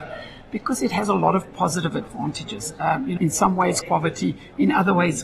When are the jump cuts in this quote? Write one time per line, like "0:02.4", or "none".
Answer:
0:03.2
0:03.8